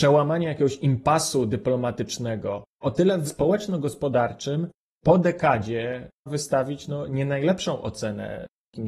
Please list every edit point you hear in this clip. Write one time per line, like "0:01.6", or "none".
0:02.7
0:03.3
0:06.3